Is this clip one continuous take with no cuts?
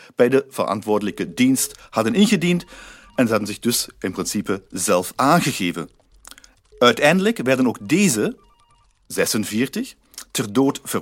yes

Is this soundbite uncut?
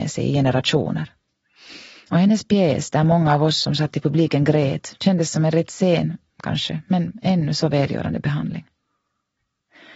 yes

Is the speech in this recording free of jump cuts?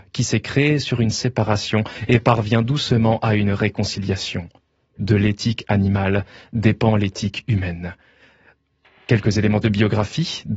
yes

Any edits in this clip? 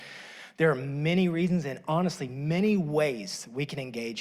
no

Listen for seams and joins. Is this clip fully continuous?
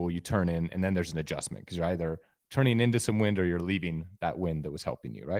yes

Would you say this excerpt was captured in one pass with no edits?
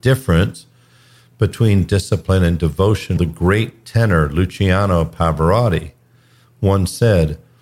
no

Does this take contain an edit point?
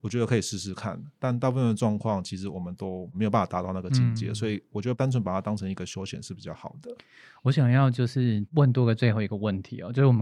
no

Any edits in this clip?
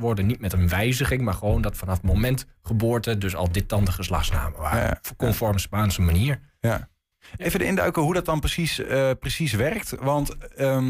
no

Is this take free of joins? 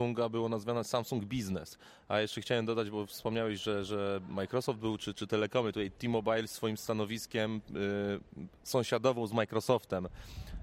yes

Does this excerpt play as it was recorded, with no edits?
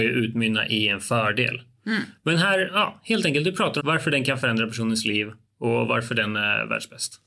no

